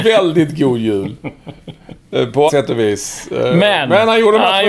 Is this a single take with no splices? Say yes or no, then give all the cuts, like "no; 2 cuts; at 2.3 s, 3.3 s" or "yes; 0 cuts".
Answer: no; 1 cut; at 2.5 s